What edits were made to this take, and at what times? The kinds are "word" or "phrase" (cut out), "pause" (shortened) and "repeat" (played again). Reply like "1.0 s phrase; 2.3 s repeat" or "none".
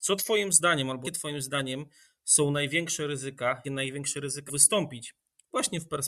1.0 s word; 3.6 s word; 4.5 s word

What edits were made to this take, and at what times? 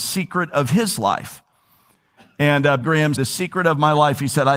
2.8 s word; 3.2 s word

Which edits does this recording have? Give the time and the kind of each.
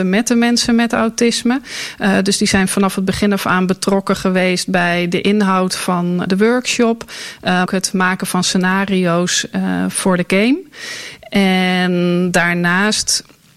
6.3 s word; 7.7 s phrase

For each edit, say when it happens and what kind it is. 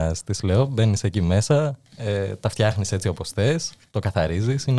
none

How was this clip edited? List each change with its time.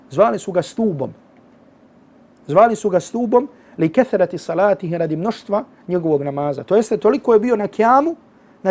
none

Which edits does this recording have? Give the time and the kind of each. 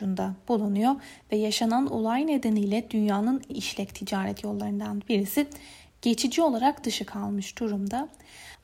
3.5 s word; 6.8 s word

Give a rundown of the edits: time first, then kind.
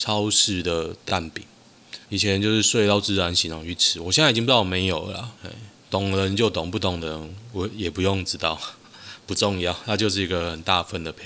2.0 s pause; 5.3 s pause

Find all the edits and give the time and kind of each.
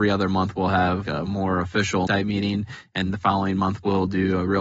1.1 s word; 2.1 s word; 3.0 s word

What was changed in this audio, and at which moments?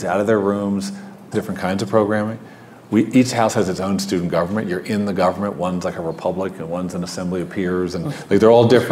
1.3 s word

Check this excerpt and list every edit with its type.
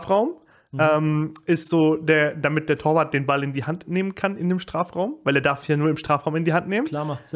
none

